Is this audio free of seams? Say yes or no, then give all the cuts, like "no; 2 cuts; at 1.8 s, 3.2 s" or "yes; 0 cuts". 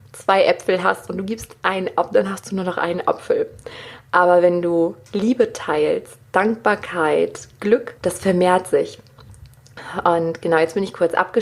no; 1 cut; at 8.0 s